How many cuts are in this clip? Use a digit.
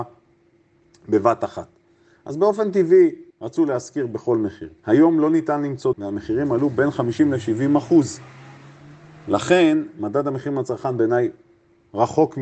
3